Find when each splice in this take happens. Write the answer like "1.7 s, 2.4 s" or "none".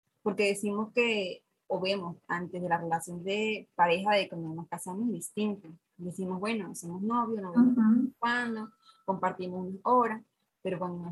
none